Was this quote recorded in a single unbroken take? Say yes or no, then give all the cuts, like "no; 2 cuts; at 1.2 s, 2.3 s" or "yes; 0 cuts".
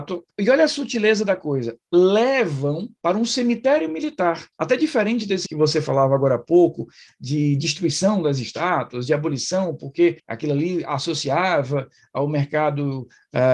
no; 4 cuts; at 3.0 s, 4.5 s, 5.5 s, 10.2 s